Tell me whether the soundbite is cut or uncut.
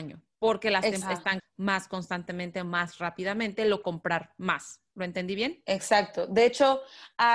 cut